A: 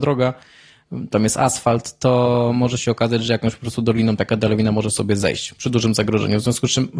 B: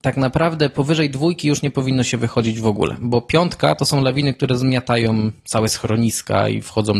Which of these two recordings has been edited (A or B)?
B